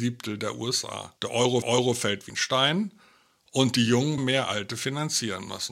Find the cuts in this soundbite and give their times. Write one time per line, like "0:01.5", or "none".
0:01.2
0:01.6
0:02.3
0:04.2